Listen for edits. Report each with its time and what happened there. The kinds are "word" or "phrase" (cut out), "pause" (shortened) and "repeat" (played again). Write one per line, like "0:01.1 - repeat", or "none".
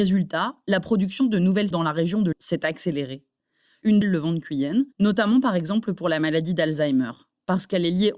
0:01.7 - word
0:02.3 - word
0:04.0 - phrase
0:04.9 - pause